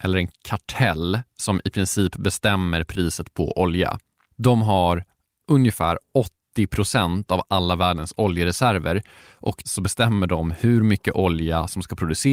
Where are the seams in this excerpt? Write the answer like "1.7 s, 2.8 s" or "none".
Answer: 9.6 s